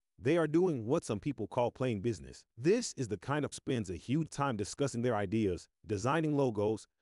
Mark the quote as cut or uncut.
cut